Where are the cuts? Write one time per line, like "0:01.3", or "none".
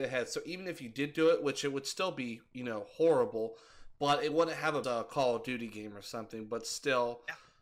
0:04.8